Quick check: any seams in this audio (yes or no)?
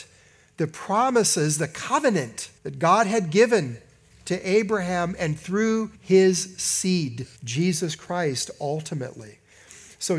yes